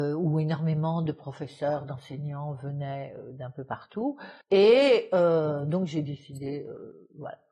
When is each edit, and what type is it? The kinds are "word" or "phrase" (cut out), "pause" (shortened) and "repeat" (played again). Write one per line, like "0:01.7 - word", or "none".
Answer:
0:04.4 - pause